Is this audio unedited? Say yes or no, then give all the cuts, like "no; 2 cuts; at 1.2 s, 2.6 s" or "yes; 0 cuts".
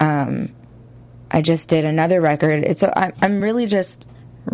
yes; 0 cuts